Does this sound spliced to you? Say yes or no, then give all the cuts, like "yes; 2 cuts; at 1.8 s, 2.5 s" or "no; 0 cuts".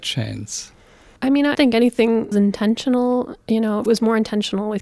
yes; 3 cuts; at 1.5 s, 2.3 s, 3.9 s